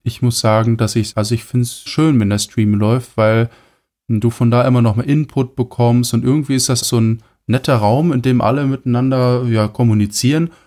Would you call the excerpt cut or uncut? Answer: cut